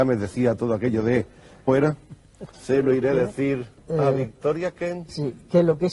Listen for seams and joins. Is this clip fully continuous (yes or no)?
no